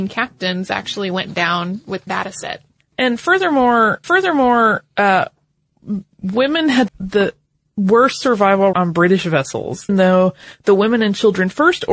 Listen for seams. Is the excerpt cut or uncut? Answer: cut